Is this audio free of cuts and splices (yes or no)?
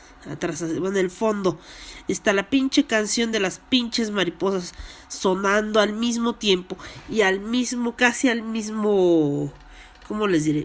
yes